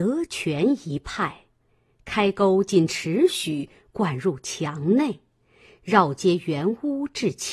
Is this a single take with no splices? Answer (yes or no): yes